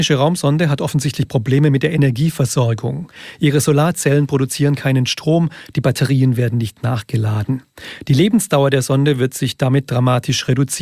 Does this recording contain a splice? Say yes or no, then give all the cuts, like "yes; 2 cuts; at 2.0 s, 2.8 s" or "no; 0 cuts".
no; 0 cuts